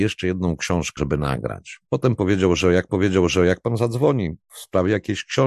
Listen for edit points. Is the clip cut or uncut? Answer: cut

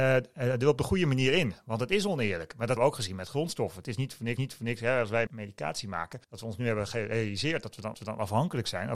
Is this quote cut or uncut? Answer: cut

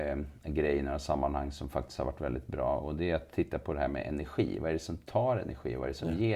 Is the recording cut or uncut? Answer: uncut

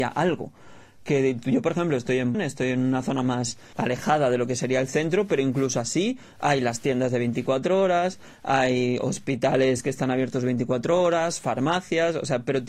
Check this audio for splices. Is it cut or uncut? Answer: cut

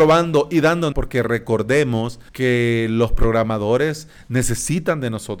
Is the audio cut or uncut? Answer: cut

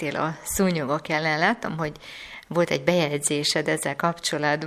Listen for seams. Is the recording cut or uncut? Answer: uncut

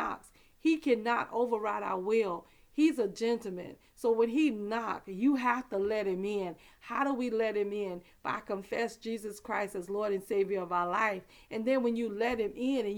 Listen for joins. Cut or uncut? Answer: uncut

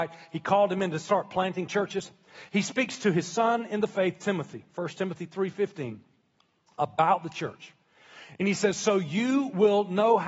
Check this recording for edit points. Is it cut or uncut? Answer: uncut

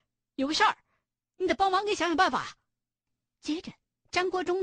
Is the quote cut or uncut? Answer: uncut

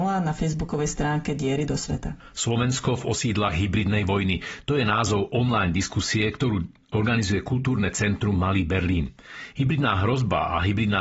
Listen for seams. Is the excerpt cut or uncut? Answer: uncut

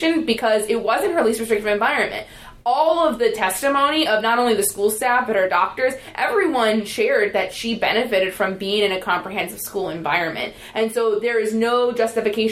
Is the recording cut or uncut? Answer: uncut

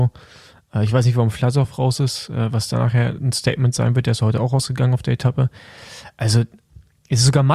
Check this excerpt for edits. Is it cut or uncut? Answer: uncut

